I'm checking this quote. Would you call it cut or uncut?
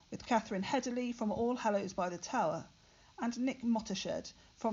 uncut